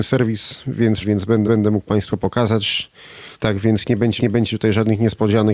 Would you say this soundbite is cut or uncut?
cut